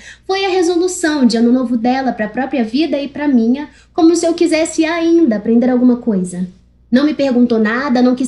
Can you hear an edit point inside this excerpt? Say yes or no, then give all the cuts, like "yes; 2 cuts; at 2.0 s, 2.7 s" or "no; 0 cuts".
no; 0 cuts